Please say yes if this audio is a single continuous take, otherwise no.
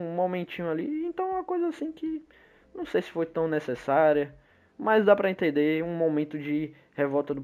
yes